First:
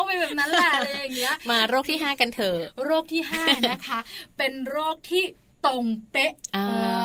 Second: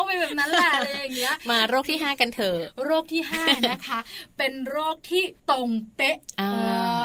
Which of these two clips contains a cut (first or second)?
second